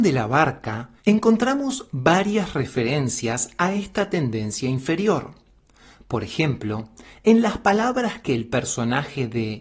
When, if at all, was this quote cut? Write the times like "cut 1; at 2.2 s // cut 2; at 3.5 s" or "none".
cut 1; at 1.0 s